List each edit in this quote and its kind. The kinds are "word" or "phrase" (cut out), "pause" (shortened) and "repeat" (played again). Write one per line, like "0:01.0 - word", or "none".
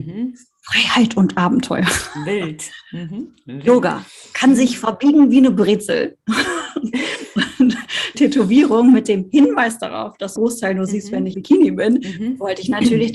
0:08.1 - word
0:10.4 - word
0:11.3 - word